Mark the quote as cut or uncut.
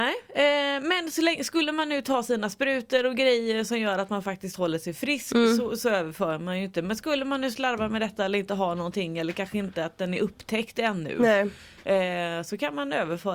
uncut